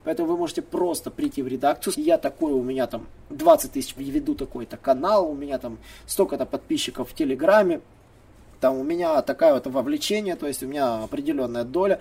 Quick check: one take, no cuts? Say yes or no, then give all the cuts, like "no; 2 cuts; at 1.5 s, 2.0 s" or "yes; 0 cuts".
no; 2 cuts; at 1.9 s, 4.0 s